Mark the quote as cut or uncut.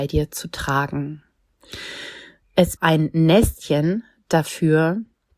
cut